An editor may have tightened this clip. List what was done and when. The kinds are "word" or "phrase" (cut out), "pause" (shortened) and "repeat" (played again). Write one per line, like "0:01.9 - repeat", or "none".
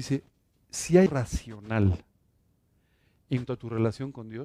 0:01.1 - word
0:03.5 - word

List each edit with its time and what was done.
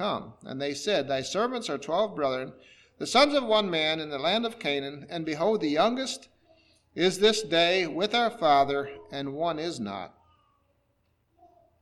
none

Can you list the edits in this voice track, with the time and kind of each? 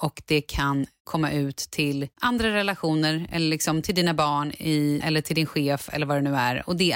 0:01.0 - word
0:02.1 - pause
0:05.0 - word

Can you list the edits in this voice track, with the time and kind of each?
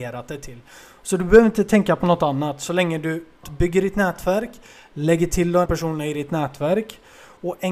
0:03.4 - word
0:05.7 - word

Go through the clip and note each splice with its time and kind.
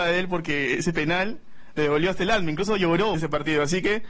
0:03.1 - word

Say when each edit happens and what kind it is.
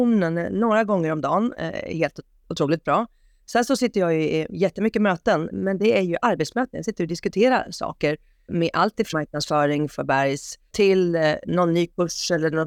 0:05.5 - word
0:08.5 - word
0:09.1 - word
0:10.7 - word

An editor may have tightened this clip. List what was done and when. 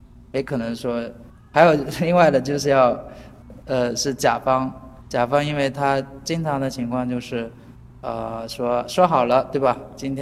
none

